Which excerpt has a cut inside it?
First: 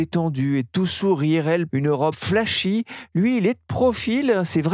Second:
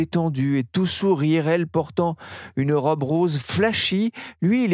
first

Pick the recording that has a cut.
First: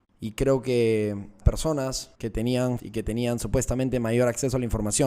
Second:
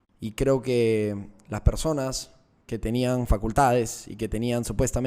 first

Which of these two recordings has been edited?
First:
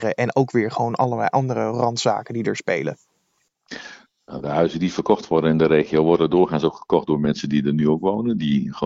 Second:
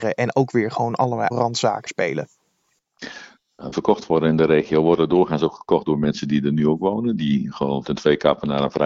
second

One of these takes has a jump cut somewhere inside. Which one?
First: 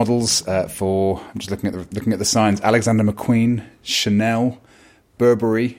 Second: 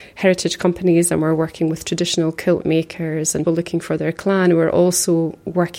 second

